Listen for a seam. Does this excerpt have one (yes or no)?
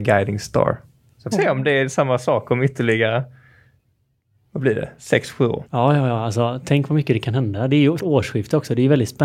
yes